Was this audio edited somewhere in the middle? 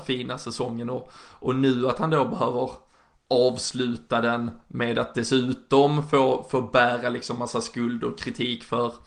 no; 0 cuts

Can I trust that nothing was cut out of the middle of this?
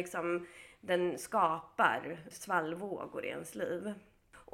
no; 1 cut; at 2.3 s

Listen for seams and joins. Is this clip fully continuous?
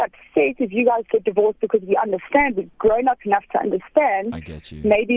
yes; 0 cuts

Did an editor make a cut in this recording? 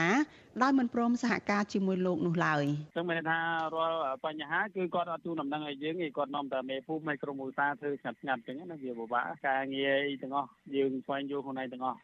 yes; 1 cut; at 2.9 s

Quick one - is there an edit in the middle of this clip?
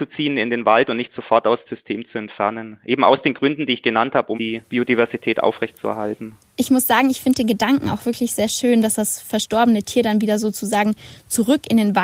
yes; 3 cuts; at 1.7 s, 4.3 s, 4.7 s

